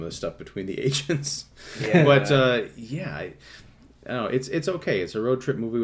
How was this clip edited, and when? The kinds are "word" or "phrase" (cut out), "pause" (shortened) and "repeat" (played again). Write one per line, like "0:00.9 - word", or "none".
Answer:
none